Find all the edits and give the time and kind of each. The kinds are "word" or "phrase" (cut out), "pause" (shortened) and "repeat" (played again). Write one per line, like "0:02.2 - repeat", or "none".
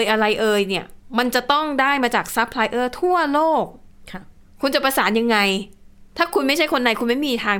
0:06.1 - pause